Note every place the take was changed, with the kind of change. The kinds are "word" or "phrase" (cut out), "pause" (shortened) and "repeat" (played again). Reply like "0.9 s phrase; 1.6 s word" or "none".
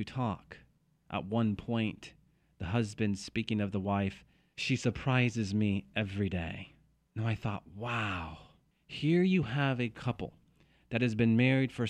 none